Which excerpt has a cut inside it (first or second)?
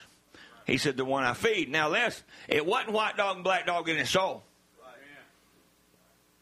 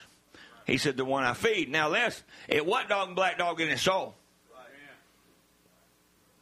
second